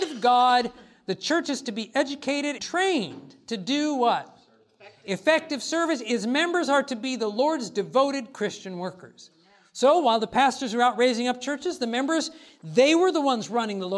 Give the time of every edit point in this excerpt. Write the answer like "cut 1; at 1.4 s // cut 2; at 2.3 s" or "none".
cut 1; at 2.6 s